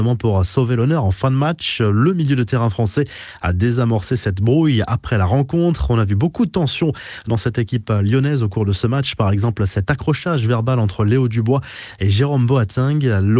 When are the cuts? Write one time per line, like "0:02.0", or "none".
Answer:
none